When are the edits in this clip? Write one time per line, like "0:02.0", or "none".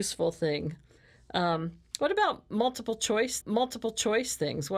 0:03.4